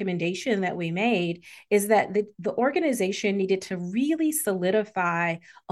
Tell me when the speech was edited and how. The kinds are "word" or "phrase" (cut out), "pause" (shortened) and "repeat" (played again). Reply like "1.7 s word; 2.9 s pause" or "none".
none